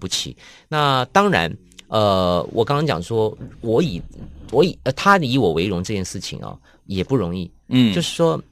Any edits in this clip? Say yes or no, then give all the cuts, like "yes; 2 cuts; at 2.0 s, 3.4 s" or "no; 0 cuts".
no; 0 cuts